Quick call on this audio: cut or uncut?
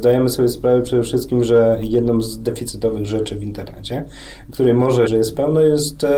cut